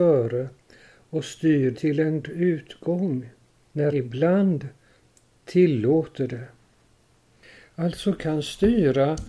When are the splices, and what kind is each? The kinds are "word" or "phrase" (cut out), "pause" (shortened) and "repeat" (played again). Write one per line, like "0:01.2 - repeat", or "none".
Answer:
0:01.7 - word
0:02.2 - word
0:03.9 - word
0:08.2 - word